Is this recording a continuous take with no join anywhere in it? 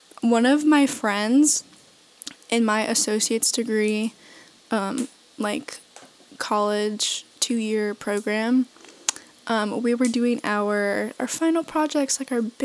no; 1 cut; at 11.2 s

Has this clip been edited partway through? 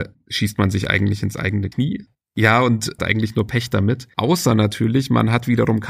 yes; 1 cut; at 3.0 s

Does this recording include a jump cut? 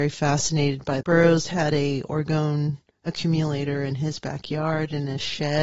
yes; 1 cut; at 1.0 s

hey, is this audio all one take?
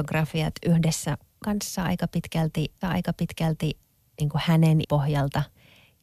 no; 3 cuts; at 1.4 s, 2.8 s, 4.8 s

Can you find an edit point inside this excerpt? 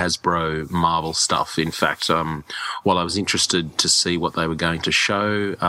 no; 0 cuts

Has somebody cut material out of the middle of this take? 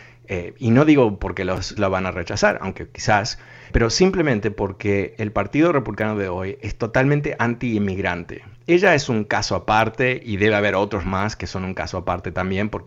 yes; 3 cuts; at 1.8 s, 3.7 s, 11.0 s

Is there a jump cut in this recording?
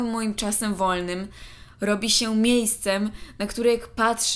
no; 0 cuts

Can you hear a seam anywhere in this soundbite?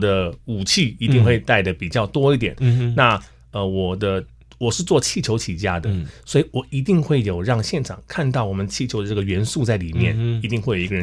no; 0 cuts

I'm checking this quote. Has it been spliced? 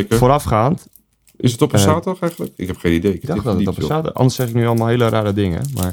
yes; 1 cut; at 3.2 s

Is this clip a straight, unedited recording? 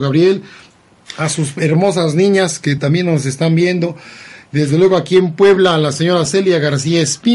yes; 0 cuts

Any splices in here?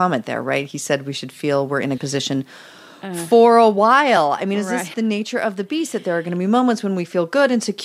yes; 2 cuts; at 2.0 s, 4.9 s

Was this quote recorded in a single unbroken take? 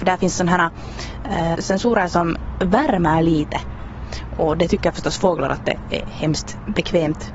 no; 1 cut; at 1.5 s

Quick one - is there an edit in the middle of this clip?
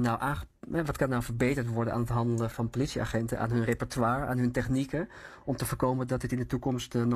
yes; 1 cut; at 2.5 s

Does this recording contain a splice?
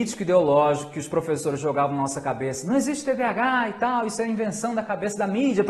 no; 0 cuts

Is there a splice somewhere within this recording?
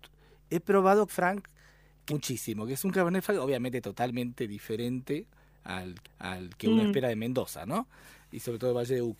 yes; 3 cuts; at 1.1 s, 2.1 s, 6.0 s

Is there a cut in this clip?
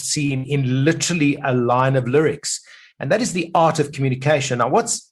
no; 0 cuts

